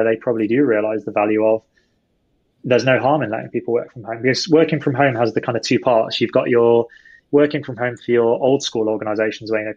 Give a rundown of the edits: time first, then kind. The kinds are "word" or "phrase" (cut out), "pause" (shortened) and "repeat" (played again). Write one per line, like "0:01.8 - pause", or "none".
none